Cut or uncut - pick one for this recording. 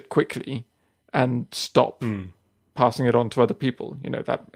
uncut